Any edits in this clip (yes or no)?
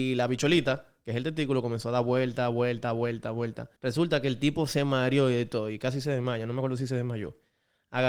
yes